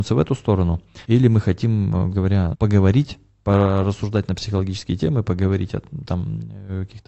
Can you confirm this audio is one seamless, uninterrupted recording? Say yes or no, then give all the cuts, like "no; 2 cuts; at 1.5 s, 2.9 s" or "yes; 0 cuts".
no; 4 cuts; at 1.0 s, 2.1 s, 2.5 s, 6.0 s